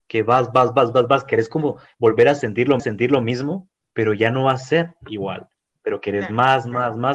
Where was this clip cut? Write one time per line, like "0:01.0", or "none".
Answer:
0:02.8